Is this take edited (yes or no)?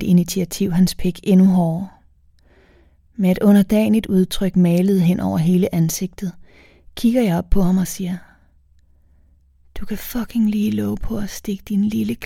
no